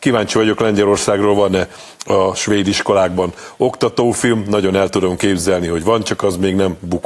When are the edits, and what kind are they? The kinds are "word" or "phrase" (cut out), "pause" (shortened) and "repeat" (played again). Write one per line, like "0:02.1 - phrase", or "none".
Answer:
none